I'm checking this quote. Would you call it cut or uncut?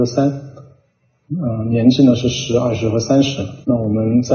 uncut